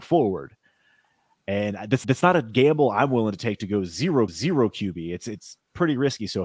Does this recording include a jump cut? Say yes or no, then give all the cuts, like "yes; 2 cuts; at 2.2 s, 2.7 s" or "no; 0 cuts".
yes; 2 cuts; at 2.0 s, 4.3 s